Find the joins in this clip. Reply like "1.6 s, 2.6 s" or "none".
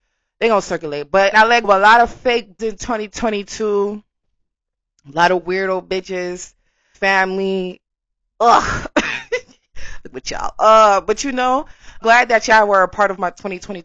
1.3 s, 1.6 s, 2.6 s, 6.9 s, 10.1 s, 12.0 s